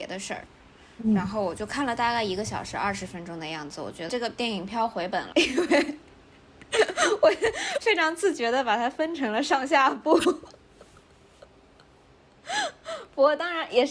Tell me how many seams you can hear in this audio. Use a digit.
2